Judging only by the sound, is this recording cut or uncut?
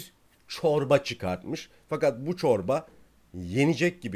uncut